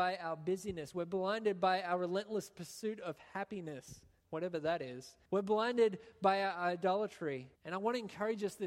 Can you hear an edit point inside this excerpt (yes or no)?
yes